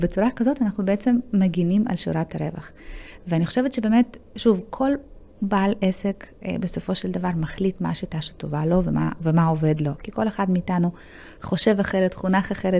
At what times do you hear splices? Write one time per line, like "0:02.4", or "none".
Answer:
none